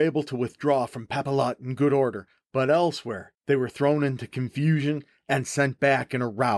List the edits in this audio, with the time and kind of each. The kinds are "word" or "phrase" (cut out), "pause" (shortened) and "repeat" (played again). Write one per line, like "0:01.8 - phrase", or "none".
0:03.4 - pause

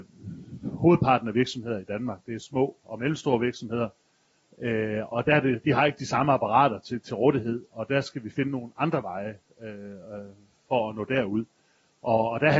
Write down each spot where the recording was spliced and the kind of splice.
0:02.8 - word
0:05.1 - word

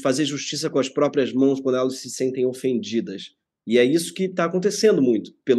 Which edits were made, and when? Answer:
none

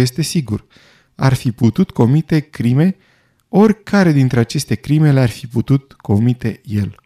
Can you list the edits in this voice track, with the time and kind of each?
none

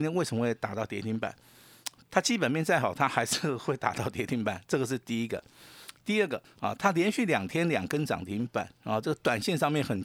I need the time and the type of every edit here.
0:04.6 - pause
0:06.4 - pause

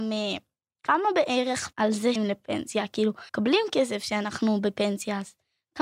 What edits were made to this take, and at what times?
0:01.7 - word
0:02.2 - word
0:03.3 - pause

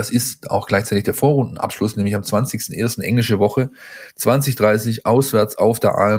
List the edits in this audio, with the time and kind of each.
none

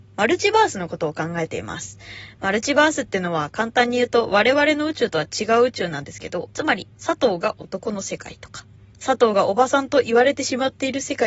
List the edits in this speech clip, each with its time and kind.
0:06.5 - pause
0:06.9 - pause

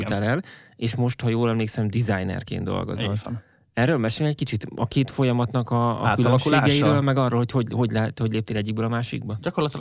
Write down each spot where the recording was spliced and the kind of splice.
none

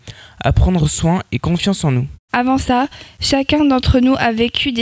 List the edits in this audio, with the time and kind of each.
0:02.2 - pause

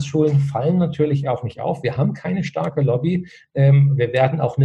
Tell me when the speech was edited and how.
none

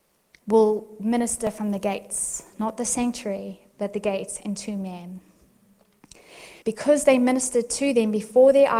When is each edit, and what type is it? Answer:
0:06.6 - pause

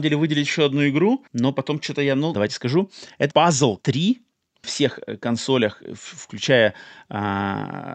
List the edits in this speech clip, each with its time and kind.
0:01.3 - pause
0:02.3 - word
0:03.3 - word
0:03.8 - word
0:04.6 - phrase

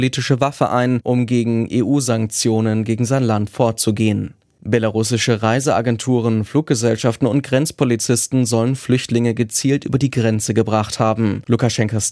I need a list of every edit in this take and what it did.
none

